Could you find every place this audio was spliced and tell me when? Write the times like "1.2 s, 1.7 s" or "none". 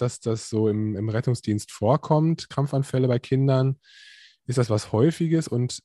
none